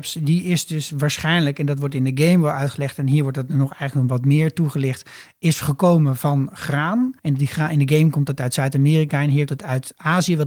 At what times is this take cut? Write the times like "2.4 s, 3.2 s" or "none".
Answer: 7.2 s, 9.5 s